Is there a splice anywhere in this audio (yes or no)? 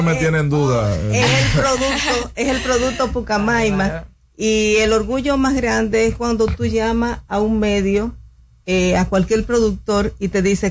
no